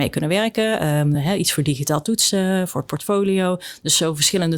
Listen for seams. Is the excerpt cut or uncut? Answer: uncut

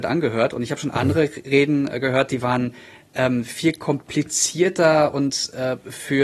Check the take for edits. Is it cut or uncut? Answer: uncut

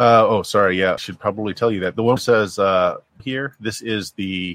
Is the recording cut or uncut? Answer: cut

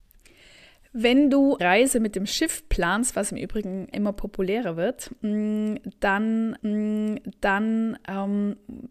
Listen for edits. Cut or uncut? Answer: cut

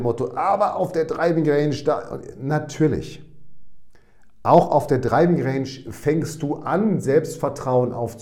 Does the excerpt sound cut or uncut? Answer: uncut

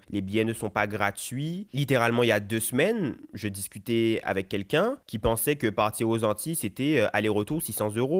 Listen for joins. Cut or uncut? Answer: uncut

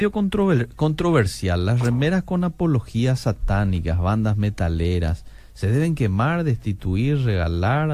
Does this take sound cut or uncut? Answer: uncut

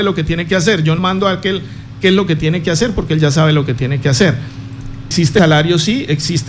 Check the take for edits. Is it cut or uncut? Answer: cut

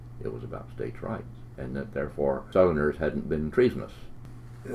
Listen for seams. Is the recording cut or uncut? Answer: uncut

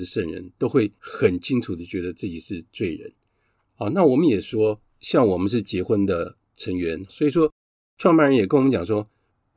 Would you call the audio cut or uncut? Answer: cut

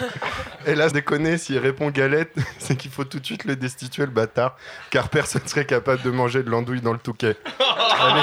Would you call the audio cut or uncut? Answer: cut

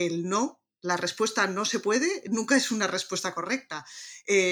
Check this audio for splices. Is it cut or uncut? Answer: uncut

